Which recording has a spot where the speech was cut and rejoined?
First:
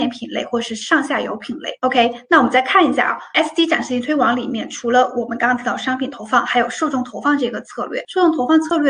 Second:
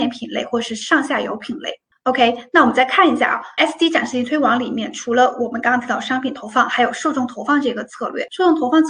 first; 1 cut; at 1.8 s

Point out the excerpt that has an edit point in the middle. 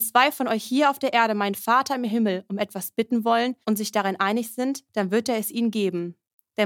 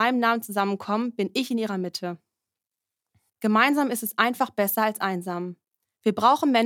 first; 2 cuts; at 3.6 s, 4.8 s

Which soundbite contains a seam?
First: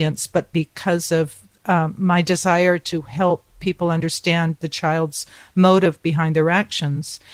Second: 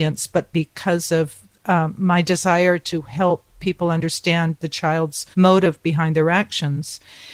second; 1 cut; at 5.3 s

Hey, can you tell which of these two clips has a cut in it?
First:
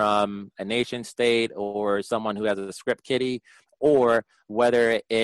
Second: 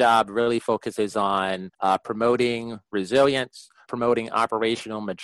second; 2 cuts; at 1.7 s, 3.8 s

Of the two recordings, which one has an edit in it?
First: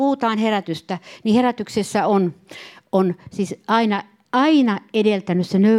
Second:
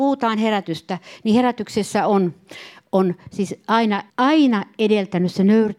second; 1 cut; at 4.1 s

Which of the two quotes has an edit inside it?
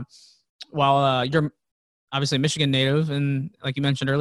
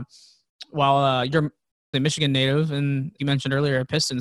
second; 2 cuts; at 1.9 s, 3.2 s

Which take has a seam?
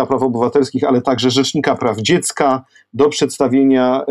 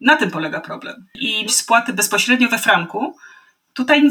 second; 1 cut; at 1.5 s

